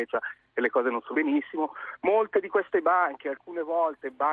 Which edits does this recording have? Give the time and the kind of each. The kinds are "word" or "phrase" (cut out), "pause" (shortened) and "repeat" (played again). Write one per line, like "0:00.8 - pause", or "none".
0:01.1 - word